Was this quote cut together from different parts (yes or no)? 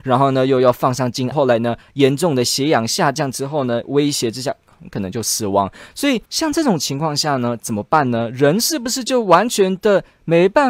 yes